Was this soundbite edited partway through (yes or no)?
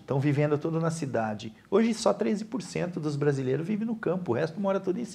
no